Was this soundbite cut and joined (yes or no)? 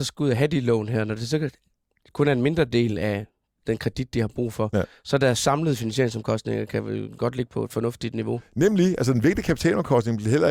no